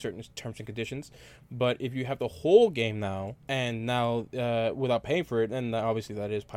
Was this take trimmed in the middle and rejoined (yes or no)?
yes